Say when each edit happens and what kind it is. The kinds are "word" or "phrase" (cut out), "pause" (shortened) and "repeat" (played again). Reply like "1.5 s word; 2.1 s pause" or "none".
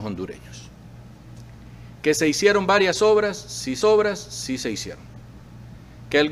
3.8 s repeat